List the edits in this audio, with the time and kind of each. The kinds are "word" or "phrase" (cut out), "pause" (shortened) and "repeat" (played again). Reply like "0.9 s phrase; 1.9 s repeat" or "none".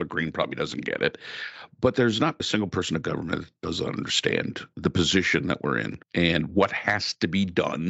2.4 s word; 6.0 s pause